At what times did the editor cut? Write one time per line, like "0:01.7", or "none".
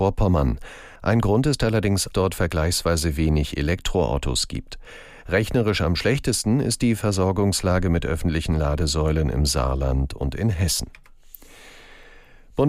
0:01.0
0:02.1